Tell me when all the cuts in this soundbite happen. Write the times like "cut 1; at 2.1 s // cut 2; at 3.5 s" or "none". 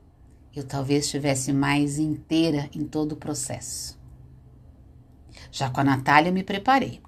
none